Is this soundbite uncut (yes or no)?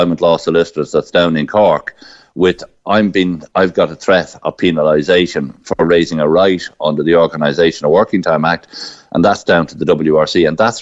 yes